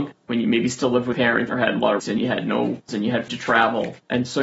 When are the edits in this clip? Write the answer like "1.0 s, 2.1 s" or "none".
1.1 s, 1.5 s, 2.0 s, 2.9 s, 3.3 s